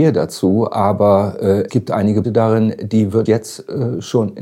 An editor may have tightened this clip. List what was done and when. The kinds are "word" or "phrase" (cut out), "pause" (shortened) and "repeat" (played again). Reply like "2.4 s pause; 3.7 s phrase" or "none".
1.7 s word; 2.2 s word; 3.3 s word